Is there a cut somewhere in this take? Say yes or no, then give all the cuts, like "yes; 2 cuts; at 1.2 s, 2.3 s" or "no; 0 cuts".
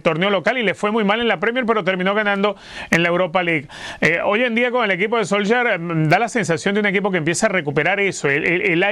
no; 0 cuts